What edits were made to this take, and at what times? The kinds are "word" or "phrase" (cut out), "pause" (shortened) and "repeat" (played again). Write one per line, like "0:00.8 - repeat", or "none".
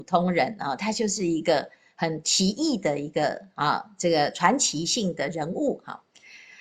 none